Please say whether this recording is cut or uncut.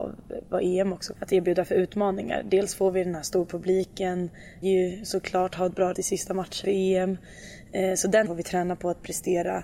cut